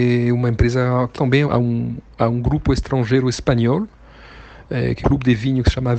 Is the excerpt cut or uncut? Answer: cut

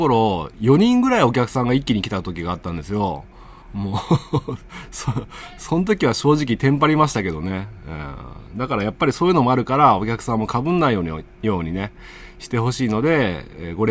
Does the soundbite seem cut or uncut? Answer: cut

